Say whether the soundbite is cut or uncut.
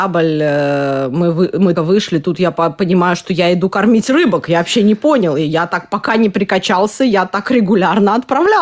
cut